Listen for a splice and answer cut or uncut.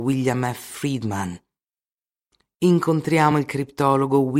uncut